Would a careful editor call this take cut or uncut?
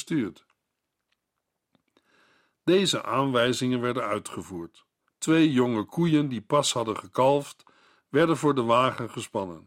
cut